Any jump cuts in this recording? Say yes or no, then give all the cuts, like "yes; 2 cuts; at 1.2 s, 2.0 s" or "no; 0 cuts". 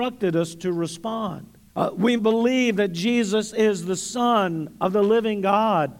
yes; 2 cuts; at 1.7 s, 2.2 s